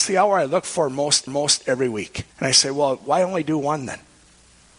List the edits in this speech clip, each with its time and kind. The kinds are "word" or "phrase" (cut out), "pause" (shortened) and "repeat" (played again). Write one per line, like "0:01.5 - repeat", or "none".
0:01.3 - repeat
0:02.3 - pause